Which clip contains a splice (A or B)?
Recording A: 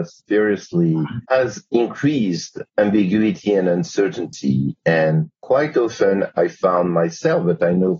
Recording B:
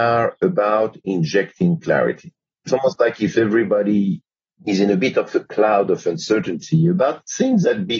A